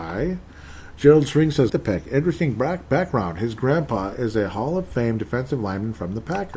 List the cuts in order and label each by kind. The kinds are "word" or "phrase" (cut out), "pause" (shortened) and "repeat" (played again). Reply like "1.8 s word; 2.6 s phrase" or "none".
1.7 s word